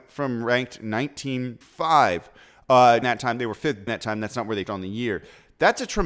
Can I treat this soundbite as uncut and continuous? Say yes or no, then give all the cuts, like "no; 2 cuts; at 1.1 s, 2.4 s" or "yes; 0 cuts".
no; 4 cuts; at 1.6 s, 3.0 s, 3.9 s, 4.6 s